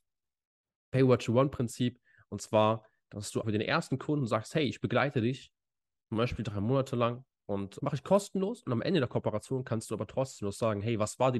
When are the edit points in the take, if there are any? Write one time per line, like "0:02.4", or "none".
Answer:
0:03.4
0:07.8